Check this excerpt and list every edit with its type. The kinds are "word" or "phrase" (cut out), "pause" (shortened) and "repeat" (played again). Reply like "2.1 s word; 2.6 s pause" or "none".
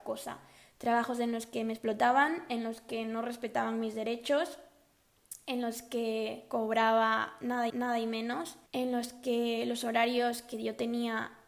7.7 s repeat; 8.7 s pause